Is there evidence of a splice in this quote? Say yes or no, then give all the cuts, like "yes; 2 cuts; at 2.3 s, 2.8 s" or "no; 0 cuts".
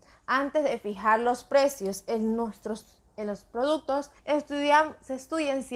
yes; 1 cut; at 4.2 s